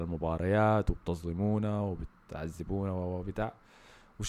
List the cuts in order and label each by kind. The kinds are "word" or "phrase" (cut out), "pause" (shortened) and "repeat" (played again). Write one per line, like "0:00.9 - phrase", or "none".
none